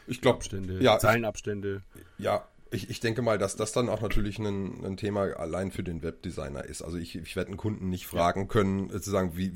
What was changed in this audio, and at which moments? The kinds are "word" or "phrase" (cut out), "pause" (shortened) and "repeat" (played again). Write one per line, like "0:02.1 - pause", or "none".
none